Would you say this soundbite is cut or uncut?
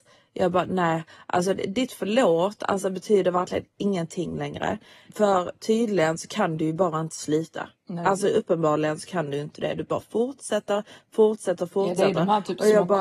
uncut